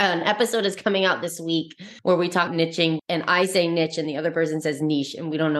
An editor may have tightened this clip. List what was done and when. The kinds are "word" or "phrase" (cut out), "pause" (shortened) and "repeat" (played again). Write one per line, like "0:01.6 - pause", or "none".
0:02.0 - pause
0:02.5 - word
0:03.0 - word